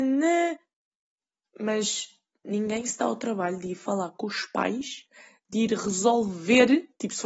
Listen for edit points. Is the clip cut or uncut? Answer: uncut